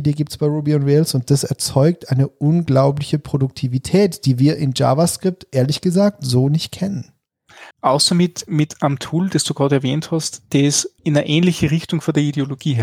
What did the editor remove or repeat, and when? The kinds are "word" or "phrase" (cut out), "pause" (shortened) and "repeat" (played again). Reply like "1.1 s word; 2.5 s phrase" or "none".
7.7 s pause; 11.0 s pause